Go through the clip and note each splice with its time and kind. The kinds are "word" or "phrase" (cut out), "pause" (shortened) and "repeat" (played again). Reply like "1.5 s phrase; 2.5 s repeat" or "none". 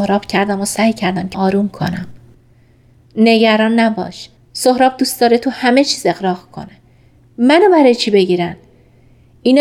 1.3 s word; 4.4 s pause